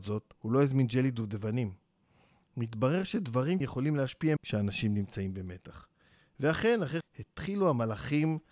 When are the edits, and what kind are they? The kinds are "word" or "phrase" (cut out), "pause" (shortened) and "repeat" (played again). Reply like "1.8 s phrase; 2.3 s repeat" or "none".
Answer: 3.6 s word; 4.4 s word; 7.0 s word